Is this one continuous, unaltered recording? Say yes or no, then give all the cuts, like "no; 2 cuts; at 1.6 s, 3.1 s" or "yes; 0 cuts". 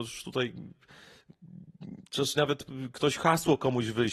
no; 1 cut; at 2.4 s